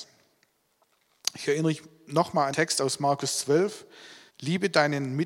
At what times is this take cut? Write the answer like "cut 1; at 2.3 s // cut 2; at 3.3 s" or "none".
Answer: cut 1; at 2.5 s // cut 2; at 4.3 s

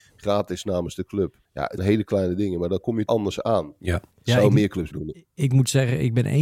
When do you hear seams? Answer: cut 1; at 1.4 s // cut 2; at 1.8 s // cut 3; at 3.1 s // cut 4; at 4.1 s // cut 5; at 4.9 s

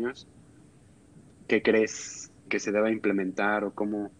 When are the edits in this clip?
cut 1; at 2.5 s

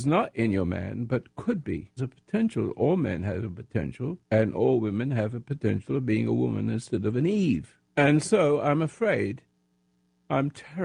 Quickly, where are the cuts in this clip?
cut 1; at 2.0 s // cut 2; at 4.2 s // cut 3; at 7.9 s

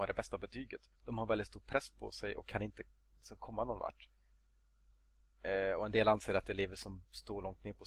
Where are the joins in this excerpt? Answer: cut 1; at 1.0 s

